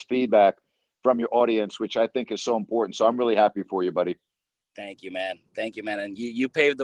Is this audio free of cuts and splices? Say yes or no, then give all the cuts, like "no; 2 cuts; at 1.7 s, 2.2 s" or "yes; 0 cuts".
yes; 0 cuts